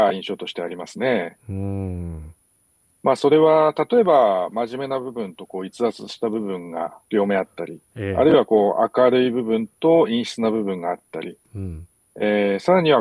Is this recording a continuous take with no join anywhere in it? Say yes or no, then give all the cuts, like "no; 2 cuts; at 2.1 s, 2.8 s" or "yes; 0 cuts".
yes; 0 cuts